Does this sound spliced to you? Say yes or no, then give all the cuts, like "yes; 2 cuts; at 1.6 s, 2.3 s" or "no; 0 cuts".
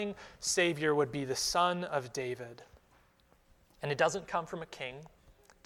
no; 0 cuts